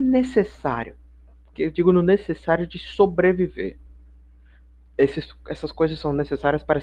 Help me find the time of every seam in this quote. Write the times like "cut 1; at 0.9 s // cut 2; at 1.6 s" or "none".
none